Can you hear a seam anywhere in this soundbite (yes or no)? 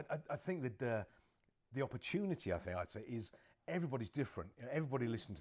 no